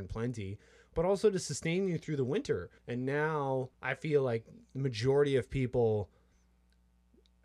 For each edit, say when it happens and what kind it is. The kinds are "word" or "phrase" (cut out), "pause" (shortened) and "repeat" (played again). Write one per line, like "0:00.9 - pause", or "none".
0:02.8 - pause
0:03.7 - pause